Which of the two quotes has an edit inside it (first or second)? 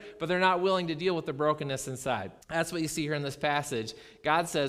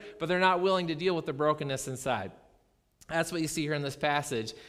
first